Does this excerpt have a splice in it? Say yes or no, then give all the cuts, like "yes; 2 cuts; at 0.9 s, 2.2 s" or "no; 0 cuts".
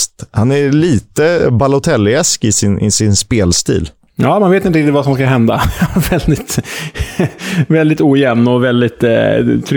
no; 0 cuts